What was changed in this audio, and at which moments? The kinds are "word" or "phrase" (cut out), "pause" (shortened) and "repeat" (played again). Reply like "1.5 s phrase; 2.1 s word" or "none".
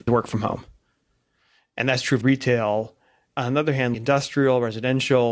2.2 s word